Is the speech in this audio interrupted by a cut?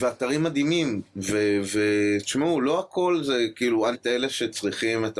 yes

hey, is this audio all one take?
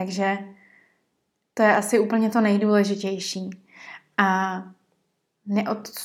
yes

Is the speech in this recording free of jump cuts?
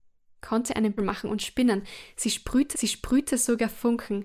no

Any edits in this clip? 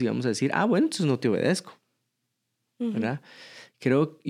no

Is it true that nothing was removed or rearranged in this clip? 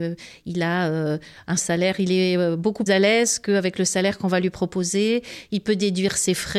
no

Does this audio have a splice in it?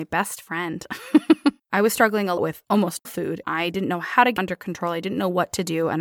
yes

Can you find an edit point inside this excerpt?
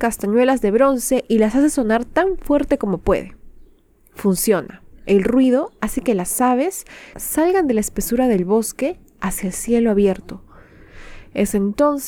yes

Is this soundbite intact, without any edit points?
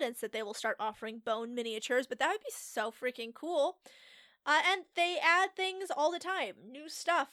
yes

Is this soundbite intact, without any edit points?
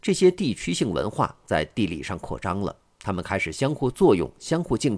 yes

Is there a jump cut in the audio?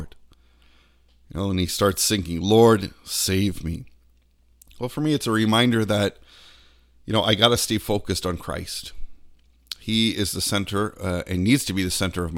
no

